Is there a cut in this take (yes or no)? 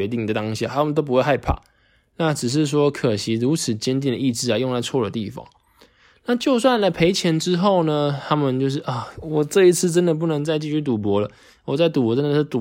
no